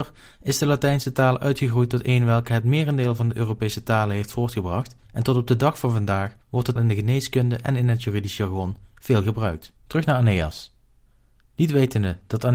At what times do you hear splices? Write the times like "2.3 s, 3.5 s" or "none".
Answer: 5.0 s, 6.4 s, 6.8 s, 9.8 s

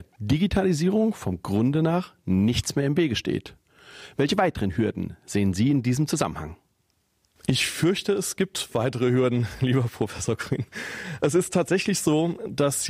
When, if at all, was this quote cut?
none

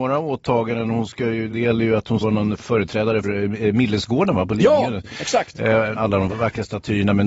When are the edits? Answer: 1.5 s, 2.2 s, 2.6 s, 3.2 s, 6.0 s, 6.3 s

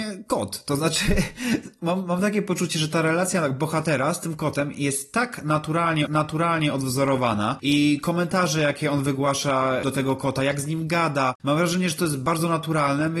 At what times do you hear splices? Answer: 6.1 s

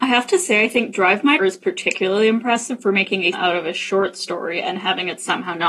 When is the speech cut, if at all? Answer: 1.4 s, 3.3 s

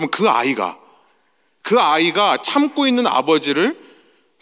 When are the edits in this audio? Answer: none

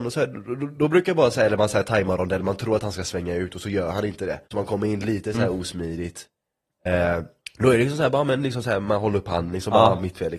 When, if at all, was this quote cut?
4.4 s, 7.4 s

